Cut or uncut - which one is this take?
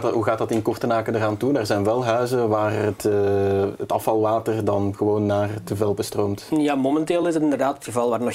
uncut